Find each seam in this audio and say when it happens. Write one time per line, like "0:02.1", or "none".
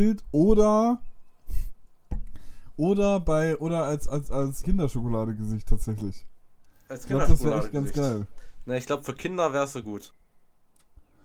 0:04.6